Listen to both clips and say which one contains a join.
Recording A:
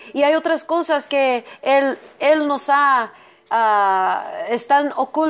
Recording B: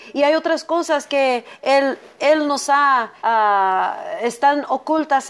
B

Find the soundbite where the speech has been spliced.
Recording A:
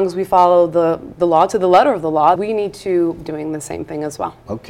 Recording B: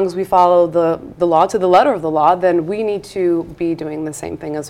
A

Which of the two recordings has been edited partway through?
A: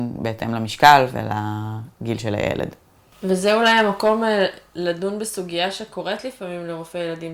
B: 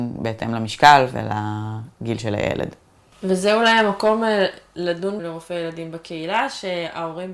B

